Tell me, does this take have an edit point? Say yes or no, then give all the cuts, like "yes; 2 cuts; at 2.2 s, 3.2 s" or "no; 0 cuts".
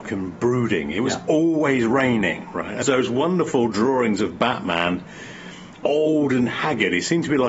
yes; 2 cuts; at 2.8 s, 5.8 s